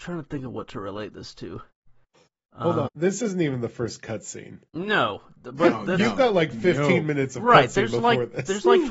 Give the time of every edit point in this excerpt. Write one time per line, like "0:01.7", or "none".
0:02.9
0:04.7